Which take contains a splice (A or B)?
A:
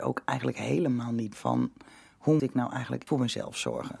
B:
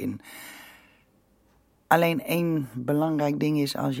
A